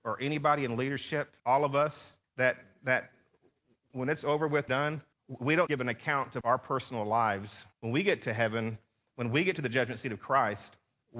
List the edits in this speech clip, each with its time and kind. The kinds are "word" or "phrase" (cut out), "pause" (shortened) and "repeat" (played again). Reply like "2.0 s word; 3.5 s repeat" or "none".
1.4 s pause; 2.2 s pause; 3.9 s word; 4.7 s word; 5.1 s pause; 5.7 s word; 6.4 s phrase; 7.7 s pause